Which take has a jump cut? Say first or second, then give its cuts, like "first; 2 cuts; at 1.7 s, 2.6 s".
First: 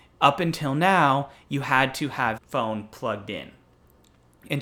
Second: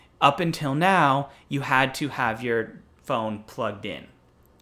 first; 1 cut; at 2.4 s